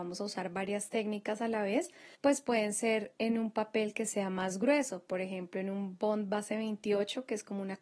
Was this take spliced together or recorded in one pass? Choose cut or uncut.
cut